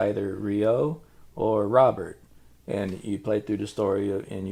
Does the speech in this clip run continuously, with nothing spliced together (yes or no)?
yes